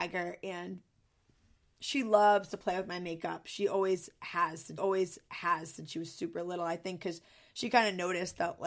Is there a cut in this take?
yes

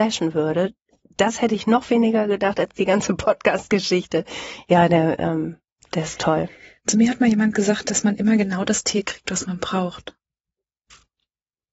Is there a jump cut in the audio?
no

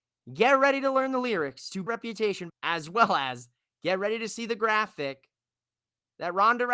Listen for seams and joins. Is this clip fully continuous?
no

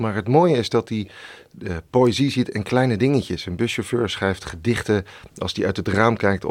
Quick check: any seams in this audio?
no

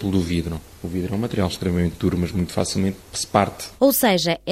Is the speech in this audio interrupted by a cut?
no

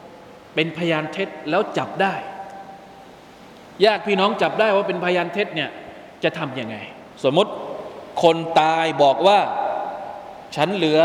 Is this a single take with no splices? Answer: no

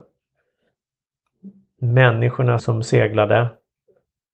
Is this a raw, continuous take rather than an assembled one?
no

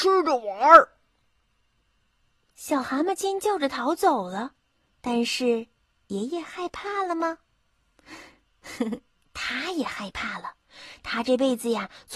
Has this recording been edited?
no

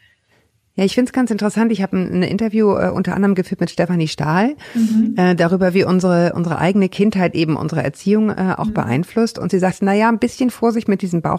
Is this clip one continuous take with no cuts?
yes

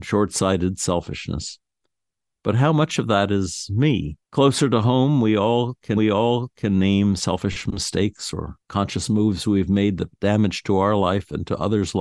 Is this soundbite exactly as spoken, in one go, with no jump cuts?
no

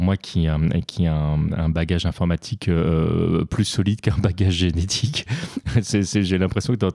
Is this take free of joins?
yes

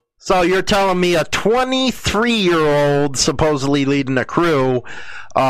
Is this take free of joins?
yes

